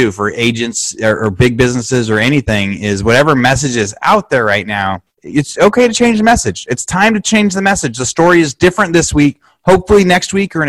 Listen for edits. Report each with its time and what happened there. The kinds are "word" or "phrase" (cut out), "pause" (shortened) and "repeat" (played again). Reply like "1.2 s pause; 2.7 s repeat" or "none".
5.1 s pause